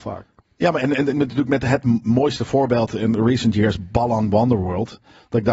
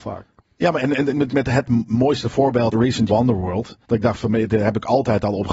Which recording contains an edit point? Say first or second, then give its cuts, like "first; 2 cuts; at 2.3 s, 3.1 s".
second; 4 cuts; at 1.3 s, 2.7 s, 3.1 s, 3.8 s